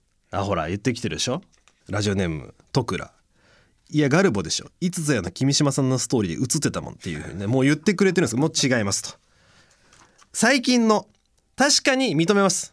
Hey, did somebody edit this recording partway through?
no; 0 cuts

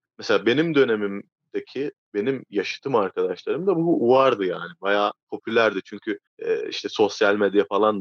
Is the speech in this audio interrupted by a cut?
yes; 2 cuts; at 5.2 s, 6.3 s

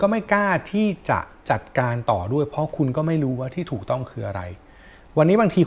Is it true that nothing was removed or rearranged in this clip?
yes; 0 cuts

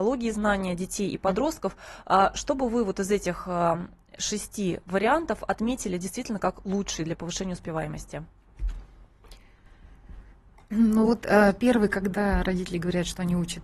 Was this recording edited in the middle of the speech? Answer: no; 0 cuts

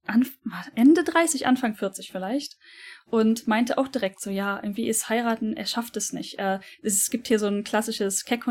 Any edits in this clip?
no; 0 cuts

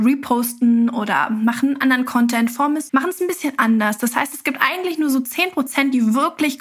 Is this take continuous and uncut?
no; 1 cut; at 2.9 s

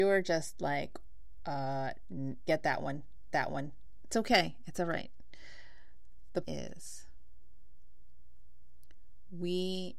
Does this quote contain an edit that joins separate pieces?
yes; 4 cuts; at 1.4 s, 2.5 s, 3.3 s, 6.4 s

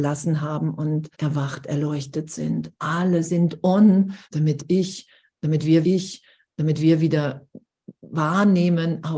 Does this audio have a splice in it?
yes; 4 cuts; at 1.1 s, 2.8 s, 4.2 s, 5.8 s

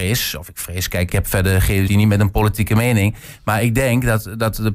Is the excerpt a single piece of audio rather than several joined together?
no; 2 cuts; at 1.1 s, 1.9 s

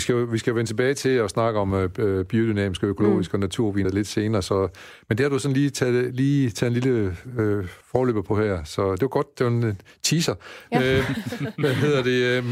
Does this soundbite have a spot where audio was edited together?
yes; 2 cuts; at 3.8 s, 7.8 s

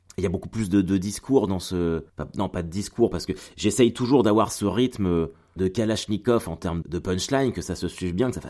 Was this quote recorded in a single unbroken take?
no; 3 cuts; at 2.1 s, 5.6 s, 6.8 s

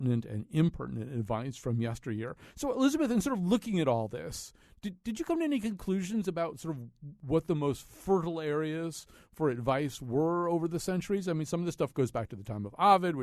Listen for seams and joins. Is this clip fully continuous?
yes; 0 cuts

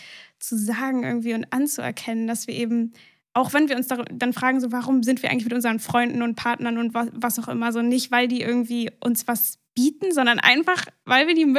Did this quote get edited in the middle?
no; 0 cuts

